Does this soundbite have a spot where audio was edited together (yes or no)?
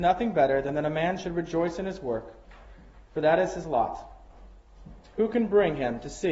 no